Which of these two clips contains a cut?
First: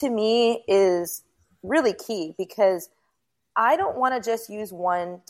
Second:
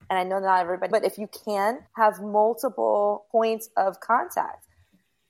second; 3 cuts; at 0.9 s, 1.9 s, 3.3 s

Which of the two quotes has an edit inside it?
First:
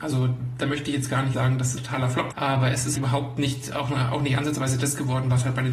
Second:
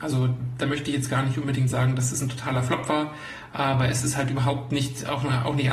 first; 4 cuts; at 1.3 s, 1.8 s, 2.3 s, 3.0 s

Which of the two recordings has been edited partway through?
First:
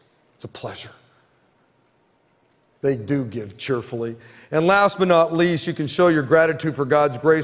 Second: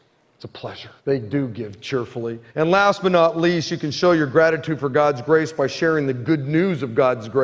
second; 2 cuts; at 1.0 s, 2.5 s

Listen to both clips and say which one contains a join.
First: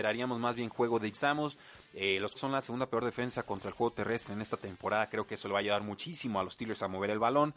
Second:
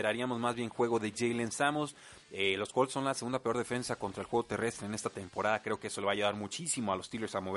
first; 2 cuts; at 1.1 s, 2.3 s

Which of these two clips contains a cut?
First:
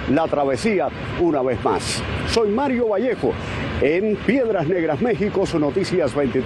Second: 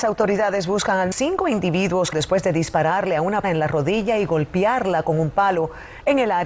second; 3 cuts; at 1.1 s, 2.1 s, 3.4 s

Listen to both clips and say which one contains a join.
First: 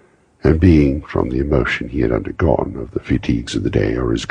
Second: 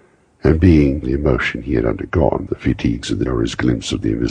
second; 3 cuts; at 1.0 s, 2.5 s, 3.3 s

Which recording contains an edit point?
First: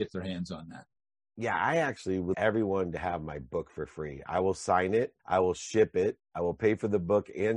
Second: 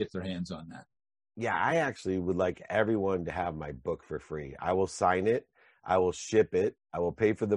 first; 2 cuts; at 2.3 s, 5.2 s

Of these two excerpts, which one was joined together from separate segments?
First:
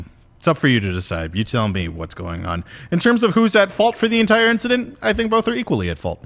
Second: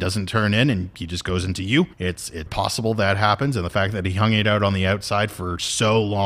second; 2 cuts; at 1.9 s, 2.5 s

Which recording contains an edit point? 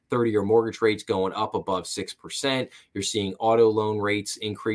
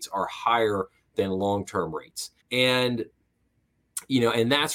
second; 1 cut; at 2.4 s

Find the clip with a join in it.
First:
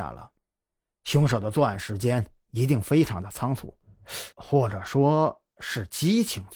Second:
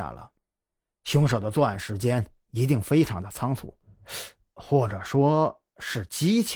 first; 1 cut; at 4.3 s

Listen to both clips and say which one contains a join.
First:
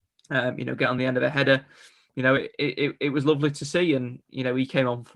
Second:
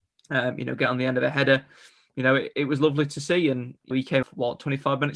second; 3 cuts; at 2.5 s, 3.9 s, 4.2 s

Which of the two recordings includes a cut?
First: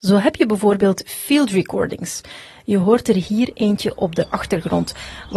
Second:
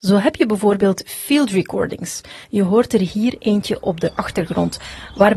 second; 1 cut; at 2.4 s

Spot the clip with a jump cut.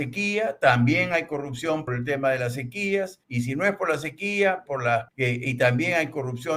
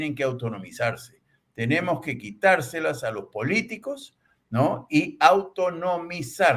first; 4 cuts; at 1.9 s, 3.2 s, 4.7 s, 5.1 s

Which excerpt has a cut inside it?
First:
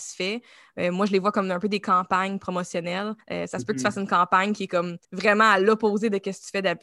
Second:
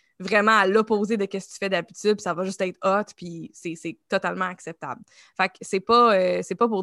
first; 2 cuts; at 3.2 s, 5.0 s

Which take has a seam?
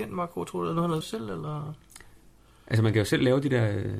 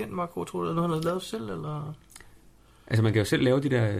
first; 1 cut; at 1.0 s

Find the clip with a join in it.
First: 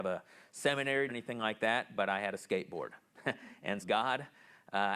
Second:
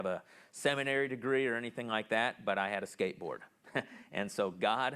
first; 2 cuts; at 1.1 s, 3.8 s

